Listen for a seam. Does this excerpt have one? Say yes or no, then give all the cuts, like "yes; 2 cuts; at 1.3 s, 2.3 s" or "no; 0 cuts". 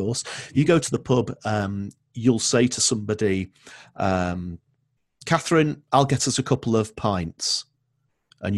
no; 0 cuts